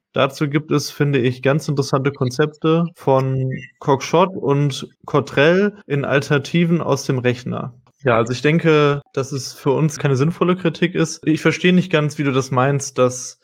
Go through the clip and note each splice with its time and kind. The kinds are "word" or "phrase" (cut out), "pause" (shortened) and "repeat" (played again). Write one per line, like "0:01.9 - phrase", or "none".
0:05.8 - pause